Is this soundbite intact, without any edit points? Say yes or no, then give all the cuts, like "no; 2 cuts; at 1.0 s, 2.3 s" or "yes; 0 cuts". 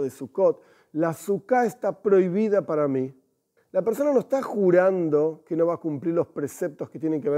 no; 1 cut; at 3.6 s